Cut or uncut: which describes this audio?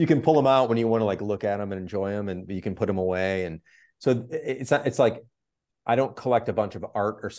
uncut